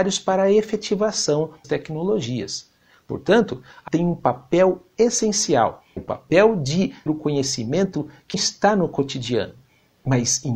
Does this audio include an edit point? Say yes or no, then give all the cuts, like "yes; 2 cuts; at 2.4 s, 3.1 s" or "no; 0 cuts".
yes; 5 cuts; at 1.6 s, 3.9 s, 6.0 s, 7.1 s, 8.3 s